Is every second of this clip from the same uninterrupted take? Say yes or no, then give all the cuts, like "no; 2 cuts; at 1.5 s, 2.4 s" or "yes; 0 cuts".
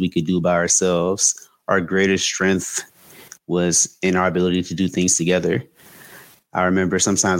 yes; 0 cuts